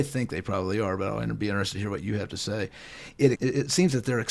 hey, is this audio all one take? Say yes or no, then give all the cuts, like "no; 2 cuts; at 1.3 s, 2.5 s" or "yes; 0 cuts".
no; 1 cut; at 3.3 s